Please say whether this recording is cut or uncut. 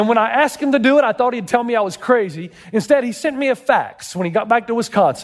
uncut